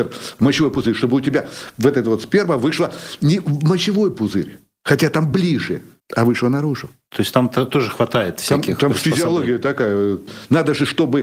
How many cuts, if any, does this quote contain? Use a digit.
0